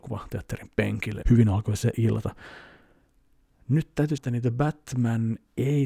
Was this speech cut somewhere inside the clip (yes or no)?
yes